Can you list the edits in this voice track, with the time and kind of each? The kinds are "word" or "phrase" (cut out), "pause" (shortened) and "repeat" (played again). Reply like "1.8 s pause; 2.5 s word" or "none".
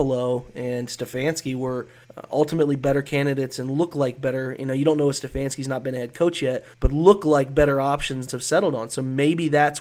2.0 s pause; 6.7 s pause; 8.3 s phrase